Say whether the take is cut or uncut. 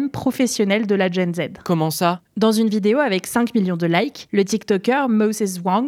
uncut